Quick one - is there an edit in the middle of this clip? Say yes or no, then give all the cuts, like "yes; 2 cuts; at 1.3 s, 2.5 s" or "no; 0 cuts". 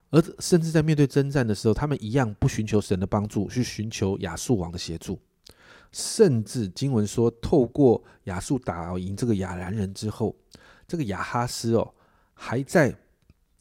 no; 0 cuts